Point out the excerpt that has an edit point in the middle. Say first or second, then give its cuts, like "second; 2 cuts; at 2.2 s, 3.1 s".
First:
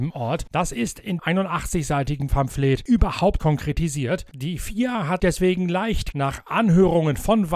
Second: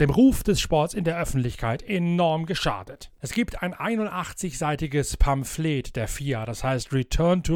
first; 4 cuts; at 1.2 s, 3.4 s, 5.2 s, 6.1 s